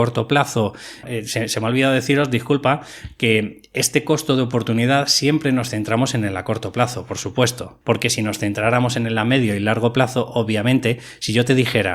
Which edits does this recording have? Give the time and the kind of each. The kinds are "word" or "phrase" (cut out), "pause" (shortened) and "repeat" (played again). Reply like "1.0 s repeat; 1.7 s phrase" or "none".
1.0 s word